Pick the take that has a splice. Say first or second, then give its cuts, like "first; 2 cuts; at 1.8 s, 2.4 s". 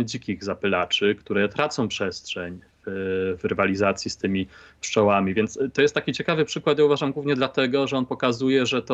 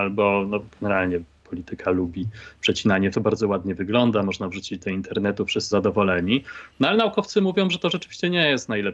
second; 2 cuts; at 3.1 s, 5.7 s